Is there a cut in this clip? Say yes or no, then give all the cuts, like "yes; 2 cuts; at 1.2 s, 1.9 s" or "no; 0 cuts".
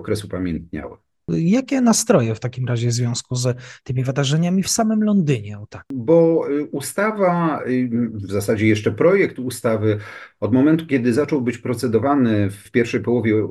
no; 0 cuts